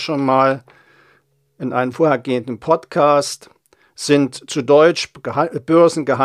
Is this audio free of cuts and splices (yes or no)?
yes